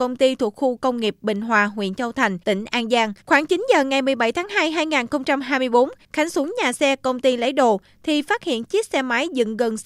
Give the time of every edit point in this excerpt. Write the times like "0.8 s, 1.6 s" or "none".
2.4 s, 3.2 s